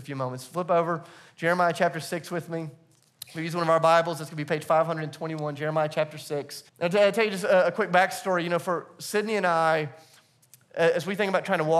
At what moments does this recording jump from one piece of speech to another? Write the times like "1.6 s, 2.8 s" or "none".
6.7 s